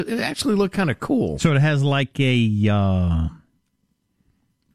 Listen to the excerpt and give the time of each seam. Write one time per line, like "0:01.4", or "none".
none